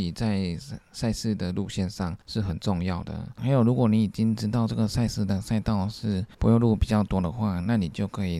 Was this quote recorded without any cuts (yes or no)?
no